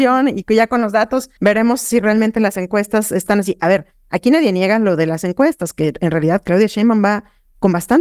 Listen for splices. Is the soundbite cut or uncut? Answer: uncut